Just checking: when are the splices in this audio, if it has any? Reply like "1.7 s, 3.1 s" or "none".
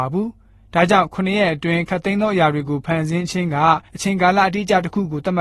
3.9 s